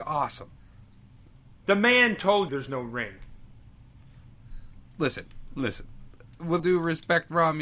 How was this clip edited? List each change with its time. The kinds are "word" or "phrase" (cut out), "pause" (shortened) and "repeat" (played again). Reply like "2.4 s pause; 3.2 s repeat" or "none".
2.5 s word; 6.6 s word